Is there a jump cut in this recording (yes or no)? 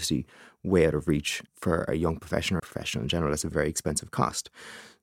yes